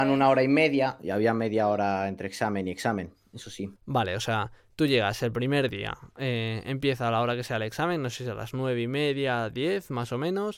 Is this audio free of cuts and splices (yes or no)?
no